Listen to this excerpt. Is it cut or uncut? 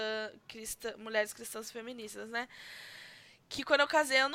uncut